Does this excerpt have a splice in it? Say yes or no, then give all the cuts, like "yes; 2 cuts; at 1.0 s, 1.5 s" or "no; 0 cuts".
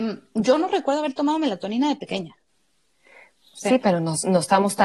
no; 0 cuts